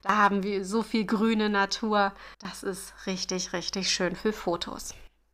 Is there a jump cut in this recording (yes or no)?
yes